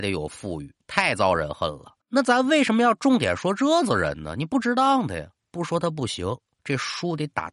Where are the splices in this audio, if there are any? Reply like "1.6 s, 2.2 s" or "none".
2.0 s